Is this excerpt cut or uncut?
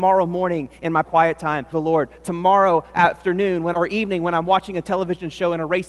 cut